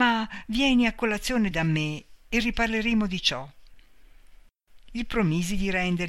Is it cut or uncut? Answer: cut